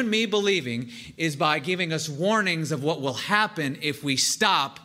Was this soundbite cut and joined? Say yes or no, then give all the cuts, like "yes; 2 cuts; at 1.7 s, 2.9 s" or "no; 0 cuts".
no; 0 cuts